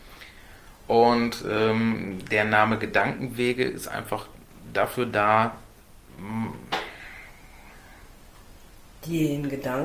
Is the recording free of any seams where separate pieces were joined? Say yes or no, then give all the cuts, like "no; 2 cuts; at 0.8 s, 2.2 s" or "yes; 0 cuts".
yes; 0 cuts